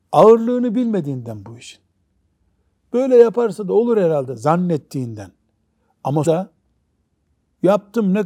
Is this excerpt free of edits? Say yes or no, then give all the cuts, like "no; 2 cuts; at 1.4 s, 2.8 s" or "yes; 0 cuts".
no; 1 cut; at 6.3 s